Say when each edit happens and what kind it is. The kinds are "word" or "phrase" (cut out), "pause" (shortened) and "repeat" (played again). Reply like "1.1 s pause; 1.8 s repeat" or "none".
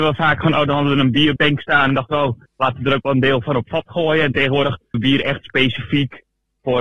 1.4 s word; 2.5 s pause; 4.9 s word